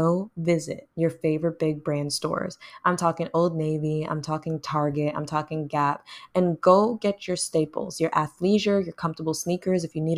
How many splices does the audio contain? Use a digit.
1